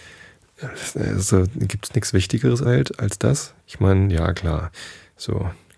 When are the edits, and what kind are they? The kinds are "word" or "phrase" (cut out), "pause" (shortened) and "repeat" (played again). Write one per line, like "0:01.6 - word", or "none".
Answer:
0:02.6 - word